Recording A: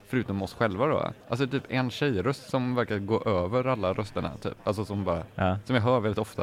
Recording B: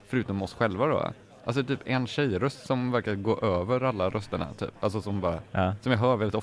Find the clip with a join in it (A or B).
A